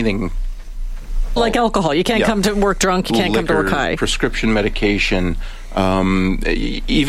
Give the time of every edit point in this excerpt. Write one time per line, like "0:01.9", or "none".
0:01.4